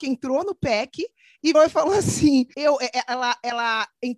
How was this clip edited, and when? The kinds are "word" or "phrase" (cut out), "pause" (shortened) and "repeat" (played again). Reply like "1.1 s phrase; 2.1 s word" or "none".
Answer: 1.5 s word; 2.5 s word